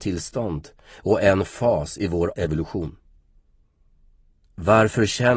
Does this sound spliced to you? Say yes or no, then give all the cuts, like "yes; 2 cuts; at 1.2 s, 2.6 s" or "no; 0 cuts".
yes; 1 cut; at 2.3 s